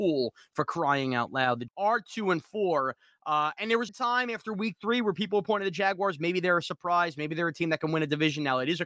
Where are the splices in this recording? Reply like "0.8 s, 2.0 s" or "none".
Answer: 1.7 s, 3.9 s